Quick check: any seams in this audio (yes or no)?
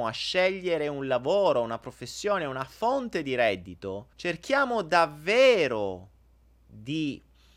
yes